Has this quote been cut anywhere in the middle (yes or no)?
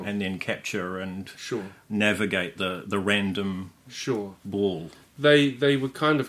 yes